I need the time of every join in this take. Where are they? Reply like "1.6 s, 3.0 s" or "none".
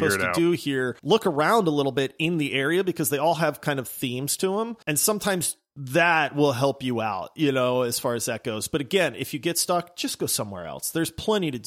1.0 s, 4.8 s